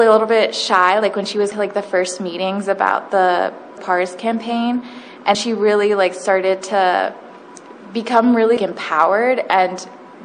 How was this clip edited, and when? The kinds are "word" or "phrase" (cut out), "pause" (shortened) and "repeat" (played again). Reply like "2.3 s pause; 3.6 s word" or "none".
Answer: 1.5 s word; 3.8 s word; 5.3 s word; 8.6 s word